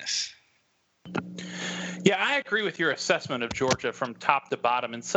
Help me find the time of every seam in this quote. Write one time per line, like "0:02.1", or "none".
none